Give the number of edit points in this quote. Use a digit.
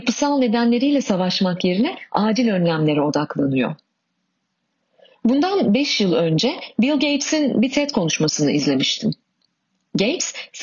0